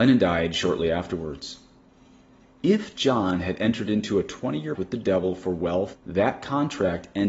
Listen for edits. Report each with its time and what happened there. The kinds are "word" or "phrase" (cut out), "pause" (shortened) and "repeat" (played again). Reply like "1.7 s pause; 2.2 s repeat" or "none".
4.7 s word; 5.9 s phrase